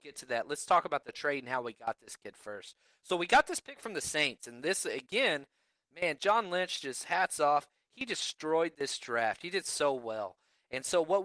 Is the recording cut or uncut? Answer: uncut